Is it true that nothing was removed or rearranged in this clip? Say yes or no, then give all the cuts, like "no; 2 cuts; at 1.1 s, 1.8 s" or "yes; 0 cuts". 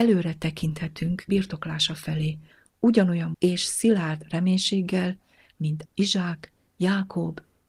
no; 3 cuts; at 1.3 s, 3.3 s, 5.9 s